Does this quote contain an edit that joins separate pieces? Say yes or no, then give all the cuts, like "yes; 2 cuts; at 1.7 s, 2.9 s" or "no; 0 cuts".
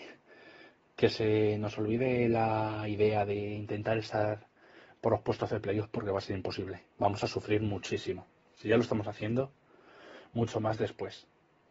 yes; 1 cut; at 6.9 s